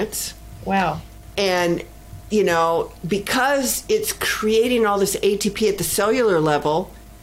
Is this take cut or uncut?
uncut